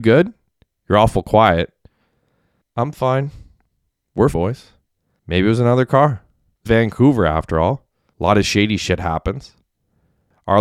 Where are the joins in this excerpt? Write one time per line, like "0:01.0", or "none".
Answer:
0:04.3
0:06.7